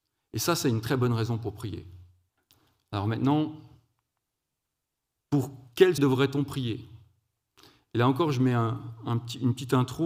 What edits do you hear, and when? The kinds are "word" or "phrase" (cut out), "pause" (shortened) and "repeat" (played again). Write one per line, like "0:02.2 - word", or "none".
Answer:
0:02.3 - pause
0:04.6 - pause
0:06.0 - word